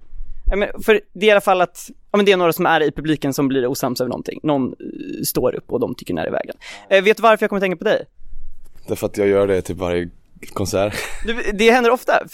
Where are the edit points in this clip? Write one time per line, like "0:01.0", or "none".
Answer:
0:02.0